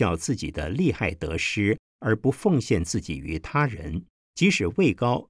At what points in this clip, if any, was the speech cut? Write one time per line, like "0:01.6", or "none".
0:04.2